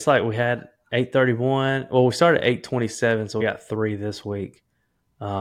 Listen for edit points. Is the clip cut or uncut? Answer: cut